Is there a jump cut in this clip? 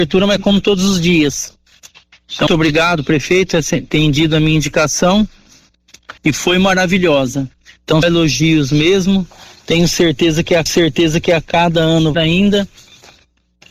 yes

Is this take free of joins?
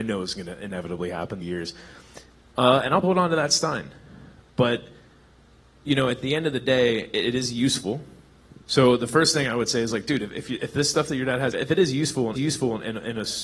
no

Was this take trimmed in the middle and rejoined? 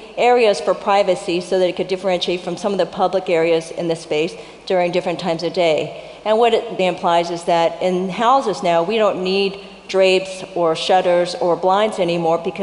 yes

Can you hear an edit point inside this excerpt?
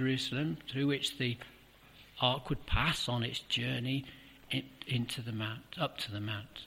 no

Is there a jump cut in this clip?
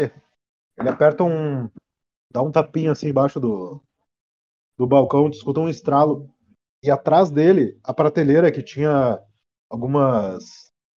no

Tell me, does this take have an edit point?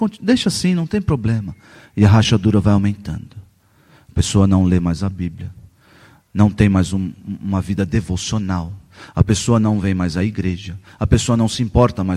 no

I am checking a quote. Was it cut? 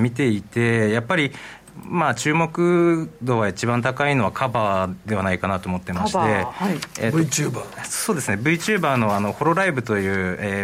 no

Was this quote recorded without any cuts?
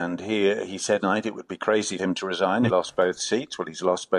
no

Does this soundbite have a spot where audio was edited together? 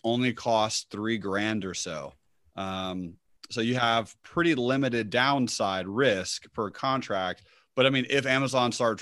no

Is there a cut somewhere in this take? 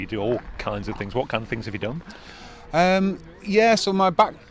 no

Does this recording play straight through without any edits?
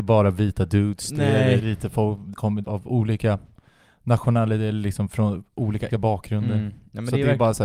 no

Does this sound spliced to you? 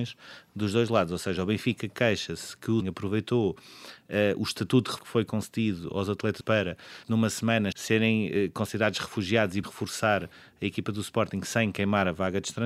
yes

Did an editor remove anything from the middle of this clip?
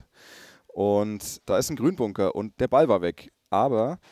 no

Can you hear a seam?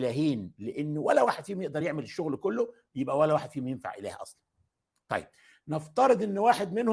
no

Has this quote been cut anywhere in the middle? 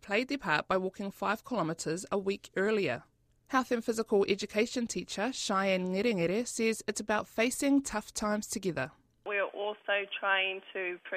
no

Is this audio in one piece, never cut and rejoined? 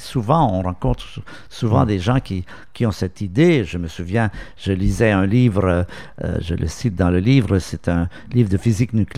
yes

